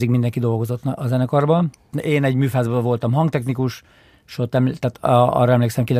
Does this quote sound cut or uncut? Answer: uncut